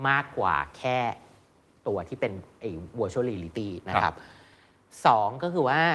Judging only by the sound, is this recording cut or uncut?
uncut